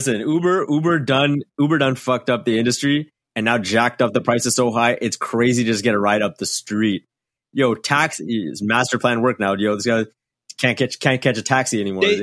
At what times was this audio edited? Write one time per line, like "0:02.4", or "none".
none